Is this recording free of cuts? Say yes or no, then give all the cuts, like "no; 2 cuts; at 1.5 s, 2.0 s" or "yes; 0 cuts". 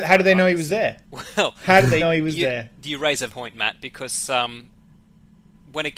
no; 3 cuts; at 1.0 s, 2.0 s, 3.3 s